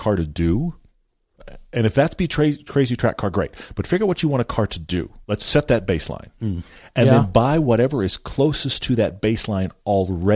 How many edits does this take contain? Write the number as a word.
one